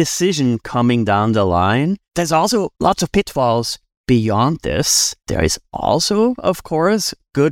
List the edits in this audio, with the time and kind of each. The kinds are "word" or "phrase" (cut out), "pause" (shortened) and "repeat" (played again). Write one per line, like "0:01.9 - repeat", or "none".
0:02.0 - pause
0:02.7 - pause
0:05.2 - pause

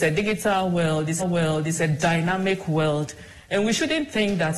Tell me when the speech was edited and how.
0:01.2 - repeat

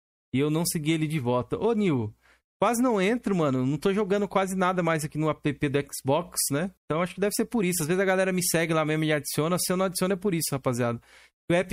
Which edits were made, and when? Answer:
0:06.8 - pause

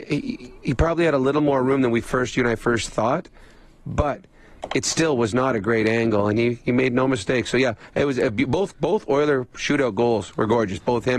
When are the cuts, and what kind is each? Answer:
none

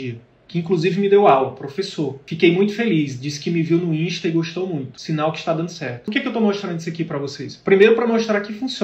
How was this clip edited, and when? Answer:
none

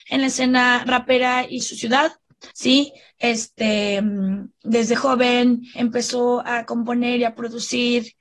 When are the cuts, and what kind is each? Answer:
0:01.6 - phrase
0:02.5 - pause
0:04.9 - word
0:05.8 - word

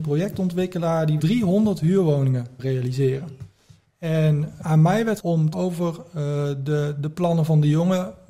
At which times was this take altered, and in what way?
0:01.2 - word
0:02.6 - word
0:04.6 - word
0:05.2 - word
0:05.5 - word

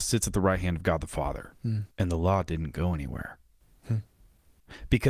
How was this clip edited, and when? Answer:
0:01.9 - pause

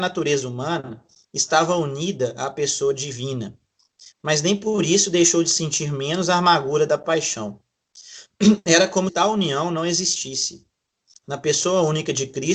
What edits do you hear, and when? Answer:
0:09.1 - word

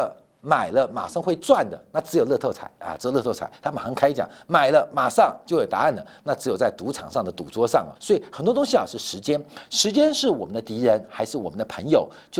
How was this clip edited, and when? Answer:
0:07.9 - pause

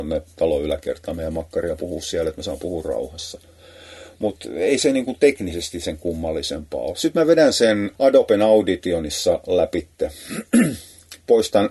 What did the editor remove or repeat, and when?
0:08.0 - pause

